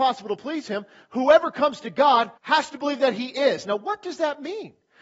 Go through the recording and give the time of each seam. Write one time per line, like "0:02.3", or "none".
0:02.4